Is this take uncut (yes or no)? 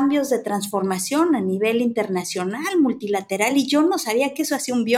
yes